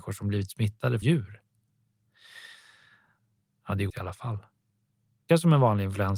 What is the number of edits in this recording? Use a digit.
3